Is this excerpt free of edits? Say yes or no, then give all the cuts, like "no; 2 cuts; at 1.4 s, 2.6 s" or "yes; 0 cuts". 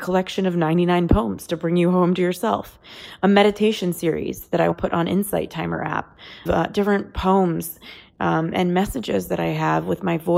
no; 2 cuts; at 4.7 s, 6.5 s